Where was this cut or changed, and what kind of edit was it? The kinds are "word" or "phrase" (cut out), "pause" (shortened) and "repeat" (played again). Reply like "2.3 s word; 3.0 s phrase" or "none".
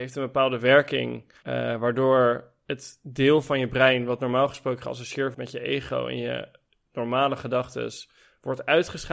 5.3 s word